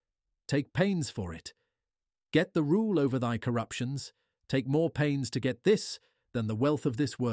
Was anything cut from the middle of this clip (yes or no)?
no